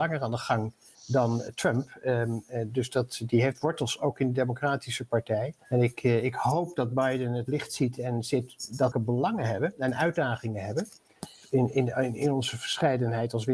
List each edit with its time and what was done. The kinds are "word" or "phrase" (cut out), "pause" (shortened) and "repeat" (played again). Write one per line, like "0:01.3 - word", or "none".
0:00.9 - pause
0:05.6 - pause
0:08.9 - phrase